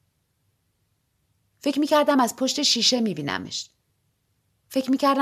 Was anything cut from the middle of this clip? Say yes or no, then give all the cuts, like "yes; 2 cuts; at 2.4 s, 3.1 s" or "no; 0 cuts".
no; 0 cuts